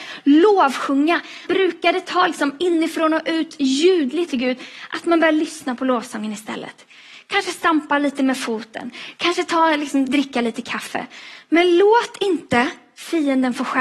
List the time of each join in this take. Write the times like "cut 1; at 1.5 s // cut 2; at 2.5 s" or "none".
cut 1; at 1.5 s // cut 2; at 4.3 s